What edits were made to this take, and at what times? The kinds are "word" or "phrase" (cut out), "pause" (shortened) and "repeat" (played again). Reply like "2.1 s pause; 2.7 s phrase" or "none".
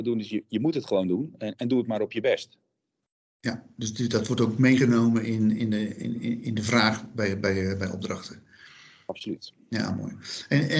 none